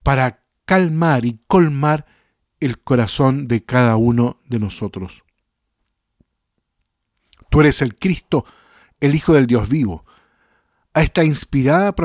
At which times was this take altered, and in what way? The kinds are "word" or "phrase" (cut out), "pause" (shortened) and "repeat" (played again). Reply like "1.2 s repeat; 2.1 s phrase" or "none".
none